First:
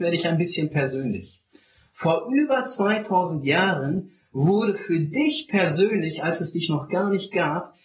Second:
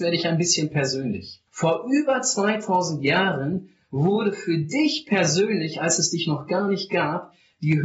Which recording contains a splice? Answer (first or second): second